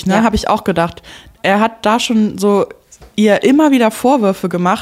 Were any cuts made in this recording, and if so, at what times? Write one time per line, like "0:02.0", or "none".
none